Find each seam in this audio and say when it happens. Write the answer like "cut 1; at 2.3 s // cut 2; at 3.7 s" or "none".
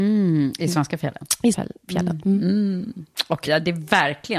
cut 1; at 1.5 s // cut 2; at 3.5 s

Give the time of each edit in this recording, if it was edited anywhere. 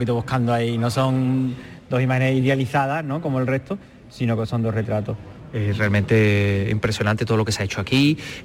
none

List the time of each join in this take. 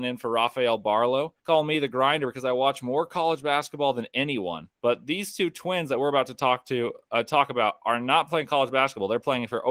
cut 1; at 1.4 s // cut 2; at 4.7 s

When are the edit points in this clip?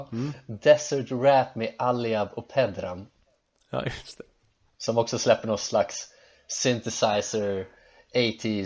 none

